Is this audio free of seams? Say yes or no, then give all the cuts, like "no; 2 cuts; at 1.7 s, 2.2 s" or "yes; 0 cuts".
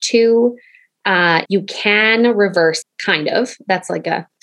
no; 2 cuts; at 1.5 s, 2.8 s